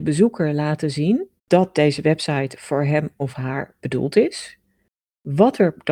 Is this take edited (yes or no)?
yes